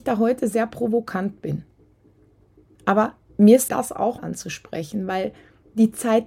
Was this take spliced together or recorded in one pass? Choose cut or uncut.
cut